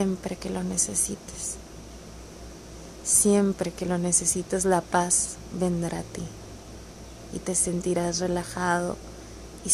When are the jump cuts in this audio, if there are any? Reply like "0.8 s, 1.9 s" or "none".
none